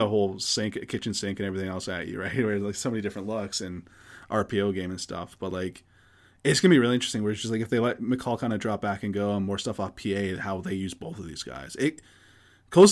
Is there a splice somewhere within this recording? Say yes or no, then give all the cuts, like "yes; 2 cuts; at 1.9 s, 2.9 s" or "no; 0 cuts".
no; 0 cuts